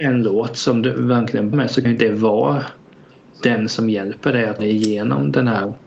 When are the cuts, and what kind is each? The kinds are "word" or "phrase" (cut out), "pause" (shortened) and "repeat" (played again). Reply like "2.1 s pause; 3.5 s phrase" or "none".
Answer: 1.5 s word; 1.8 s word; 4.6 s word